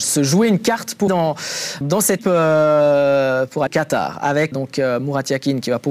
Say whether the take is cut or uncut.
cut